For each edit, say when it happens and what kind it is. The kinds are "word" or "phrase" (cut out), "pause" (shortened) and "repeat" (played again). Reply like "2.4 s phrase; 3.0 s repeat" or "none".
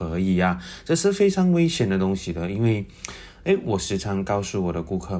none